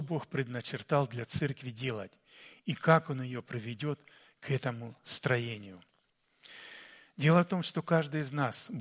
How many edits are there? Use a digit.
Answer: 0